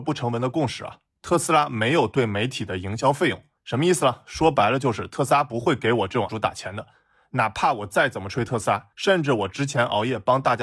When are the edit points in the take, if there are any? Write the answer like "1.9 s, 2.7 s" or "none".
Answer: 6.3 s, 8.9 s